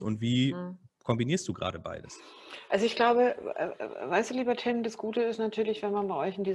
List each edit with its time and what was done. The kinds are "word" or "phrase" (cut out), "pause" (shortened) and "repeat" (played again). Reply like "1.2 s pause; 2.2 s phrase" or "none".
none